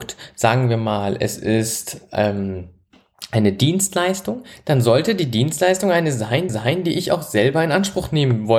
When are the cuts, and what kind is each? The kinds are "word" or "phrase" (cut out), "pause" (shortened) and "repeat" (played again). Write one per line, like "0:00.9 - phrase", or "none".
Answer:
0:06.5 - repeat